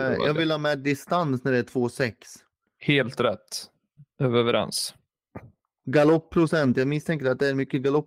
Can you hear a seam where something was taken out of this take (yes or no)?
no